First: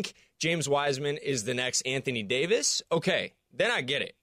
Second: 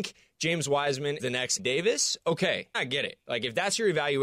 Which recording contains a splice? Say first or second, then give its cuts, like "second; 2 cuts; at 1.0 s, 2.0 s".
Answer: second; 3 cuts; at 1.2 s, 1.6 s, 2.7 s